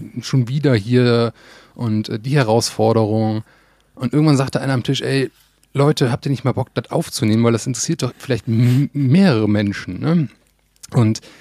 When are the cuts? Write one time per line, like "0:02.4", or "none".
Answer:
0:08.1